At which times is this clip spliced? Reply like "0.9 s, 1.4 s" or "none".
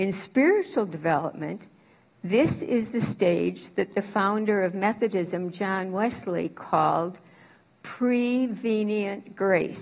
none